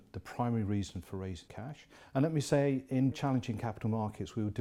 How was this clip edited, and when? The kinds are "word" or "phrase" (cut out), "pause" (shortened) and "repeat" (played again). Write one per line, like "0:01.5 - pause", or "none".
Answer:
0:01.5 - word
0:03.1 - word